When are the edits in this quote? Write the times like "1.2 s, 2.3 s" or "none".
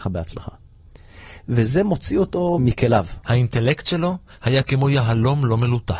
2.6 s